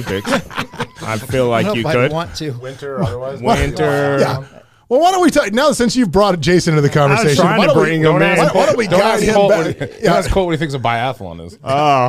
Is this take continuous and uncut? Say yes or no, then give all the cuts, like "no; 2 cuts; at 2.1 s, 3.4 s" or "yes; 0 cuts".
yes; 0 cuts